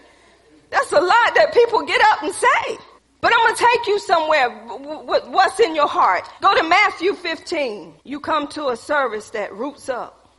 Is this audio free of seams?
no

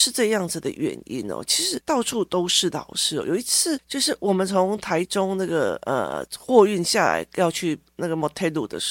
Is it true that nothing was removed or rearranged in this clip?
no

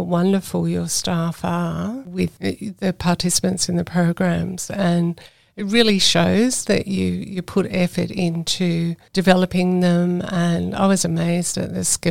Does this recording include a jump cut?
no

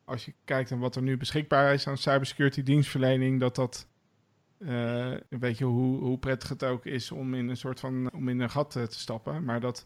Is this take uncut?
no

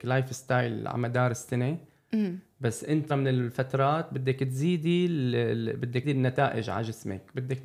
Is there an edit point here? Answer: yes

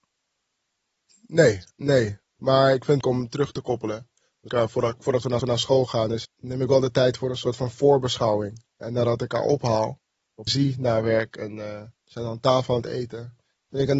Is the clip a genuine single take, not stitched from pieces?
no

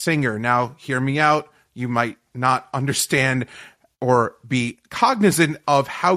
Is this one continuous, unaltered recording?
yes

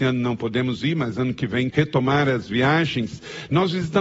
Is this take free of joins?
no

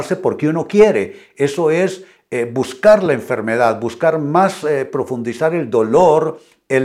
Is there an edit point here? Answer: no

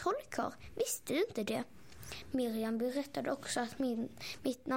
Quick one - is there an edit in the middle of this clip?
no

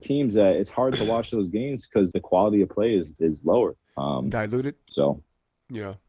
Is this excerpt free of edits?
no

